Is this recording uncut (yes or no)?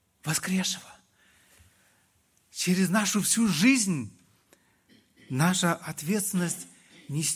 yes